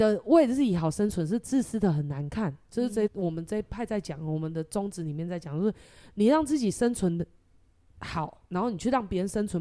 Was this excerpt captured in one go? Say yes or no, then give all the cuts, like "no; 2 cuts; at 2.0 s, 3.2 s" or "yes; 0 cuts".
no; 1 cut; at 3.1 s